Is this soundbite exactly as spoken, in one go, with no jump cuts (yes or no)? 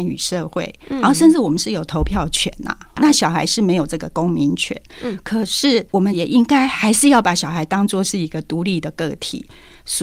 no